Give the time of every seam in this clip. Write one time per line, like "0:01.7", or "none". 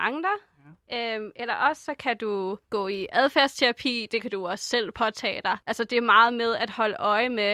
0:02.6
0:05.6